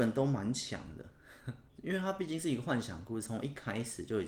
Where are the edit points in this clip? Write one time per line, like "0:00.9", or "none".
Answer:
0:01.7